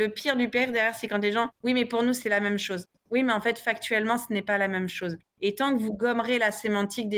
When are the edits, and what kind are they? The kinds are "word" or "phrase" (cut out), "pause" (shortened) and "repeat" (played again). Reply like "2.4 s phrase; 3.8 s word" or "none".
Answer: none